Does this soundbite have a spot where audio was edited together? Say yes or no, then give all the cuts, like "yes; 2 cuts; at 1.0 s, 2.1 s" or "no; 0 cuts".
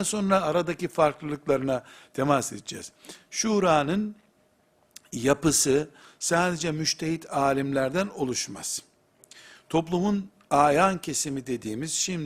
no; 0 cuts